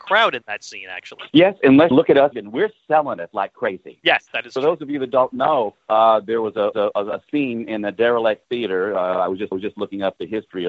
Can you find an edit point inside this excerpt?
yes; 6 cuts; at 1.3 s, 1.9 s, 2.3 s, 5.8 s, 6.7 s, 9.5 s

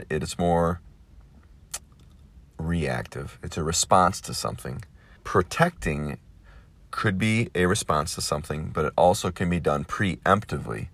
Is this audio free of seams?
no; 1 cut; at 5.2 s

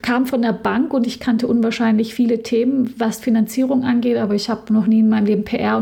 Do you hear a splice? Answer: no; 0 cuts

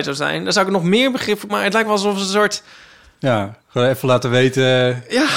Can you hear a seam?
yes; 2 cuts; at 1.5 s, 3.6 s

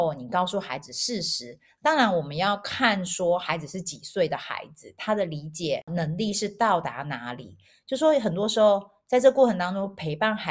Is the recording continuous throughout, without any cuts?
yes; 0 cuts

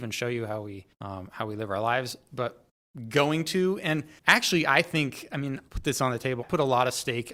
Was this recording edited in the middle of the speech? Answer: yes; 4 cuts; at 0.9 s, 4.2 s, 5.7 s, 6.4 s

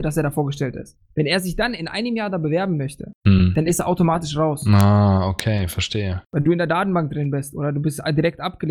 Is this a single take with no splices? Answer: no; 2 cuts; at 1.0 s, 3.1 s

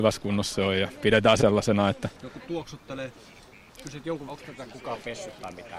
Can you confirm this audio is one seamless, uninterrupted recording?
no; 3 cuts; at 1.4 s, 2.2 s, 4.3 s

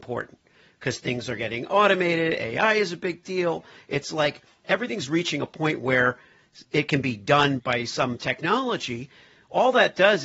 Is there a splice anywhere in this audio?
no; 0 cuts

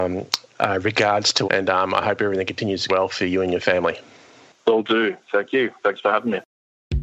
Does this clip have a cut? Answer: yes; 2 cuts; at 1.4 s, 2.9 s

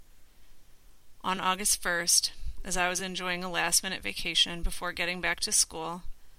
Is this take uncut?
yes; 0 cuts

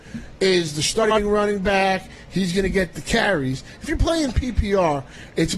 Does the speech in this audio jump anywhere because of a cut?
no; 0 cuts

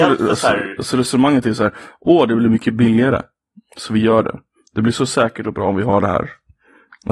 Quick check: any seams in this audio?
no; 0 cuts

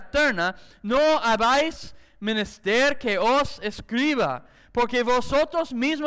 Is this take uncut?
yes; 0 cuts

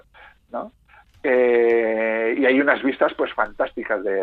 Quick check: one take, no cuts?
yes; 0 cuts

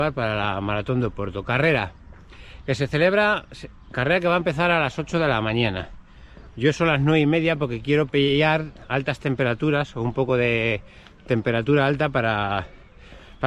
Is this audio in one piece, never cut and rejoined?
yes; 0 cuts

